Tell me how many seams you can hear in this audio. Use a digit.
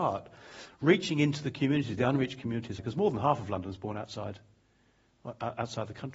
1